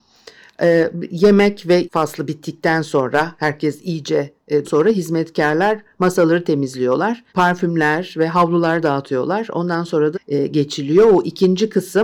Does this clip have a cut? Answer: yes; 4 cuts; at 1.8 s, 4.6 s, 7.3 s, 10.1 s

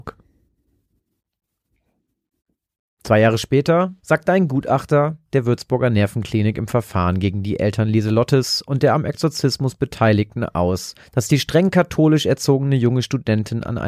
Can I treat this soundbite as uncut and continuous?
no; 3 cuts; at 4.0 s, 5.3 s, 11.0 s

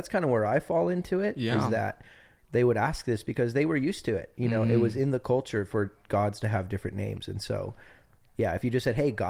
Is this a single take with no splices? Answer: yes; 0 cuts

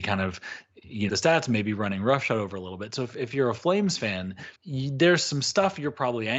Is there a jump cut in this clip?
yes; 2 cuts; at 1.1 s, 4.6 s

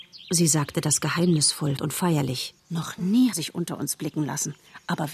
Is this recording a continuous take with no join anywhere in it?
no; 3 cuts; at 1.8 s, 2.6 s, 3.3 s

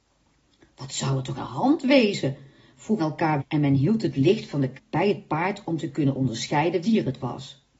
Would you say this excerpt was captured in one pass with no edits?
no; 5 cuts; at 1.4 s, 3.0 s, 3.4 s, 4.7 s, 6.8 s

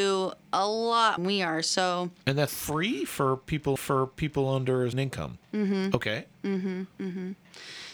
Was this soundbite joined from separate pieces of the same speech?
yes; 5 cuts; at 1.2 s, 2.5 s, 3.8 s, 4.9 s, 6.9 s

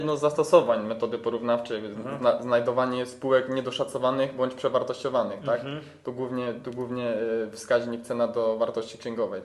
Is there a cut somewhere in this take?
no; 0 cuts

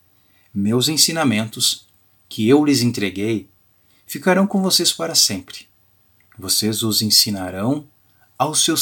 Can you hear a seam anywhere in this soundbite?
no; 0 cuts

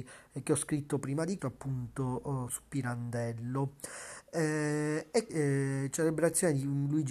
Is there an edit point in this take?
yes; 3 cuts; at 1.4 s, 2.5 s, 5.3 s

